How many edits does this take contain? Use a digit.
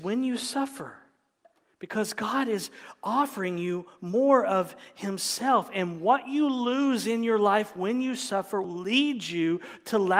1